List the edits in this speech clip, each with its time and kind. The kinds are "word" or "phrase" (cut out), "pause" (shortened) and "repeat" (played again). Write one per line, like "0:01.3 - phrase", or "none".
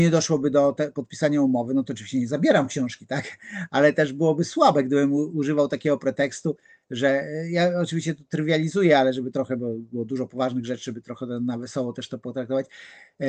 none